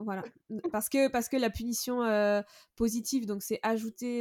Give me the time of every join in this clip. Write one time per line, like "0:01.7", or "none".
none